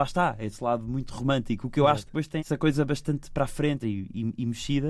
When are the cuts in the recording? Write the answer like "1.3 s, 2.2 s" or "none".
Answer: 2.4 s, 3.8 s